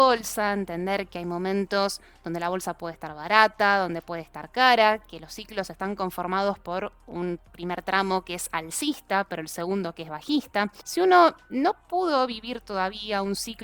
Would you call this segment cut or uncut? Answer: uncut